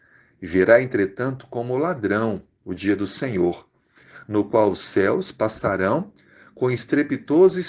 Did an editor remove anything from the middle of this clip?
no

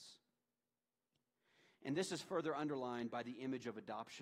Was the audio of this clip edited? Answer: no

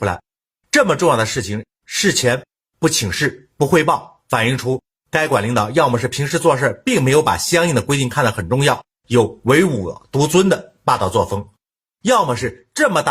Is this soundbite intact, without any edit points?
yes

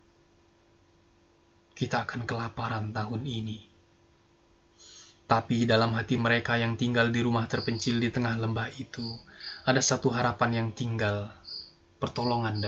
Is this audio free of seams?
yes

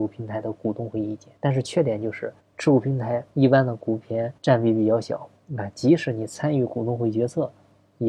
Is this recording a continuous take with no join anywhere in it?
no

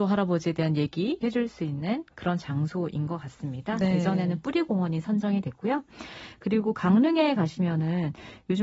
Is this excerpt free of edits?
no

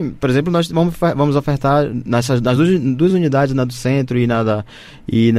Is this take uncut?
yes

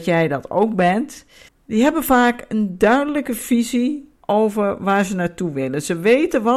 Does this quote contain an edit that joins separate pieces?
yes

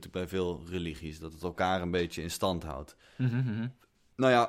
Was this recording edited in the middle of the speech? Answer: no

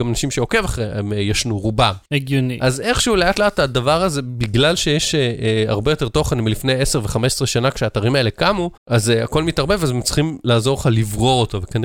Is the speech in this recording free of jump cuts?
no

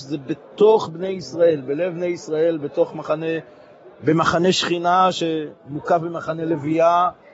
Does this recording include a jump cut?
no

